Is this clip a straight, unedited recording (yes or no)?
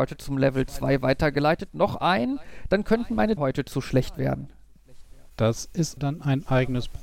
no